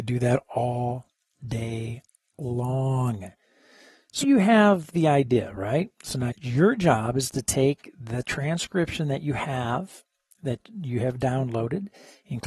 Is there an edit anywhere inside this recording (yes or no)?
yes